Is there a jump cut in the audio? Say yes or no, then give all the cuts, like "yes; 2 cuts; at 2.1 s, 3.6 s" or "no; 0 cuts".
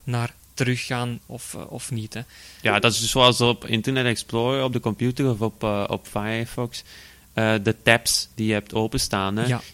no; 0 cuts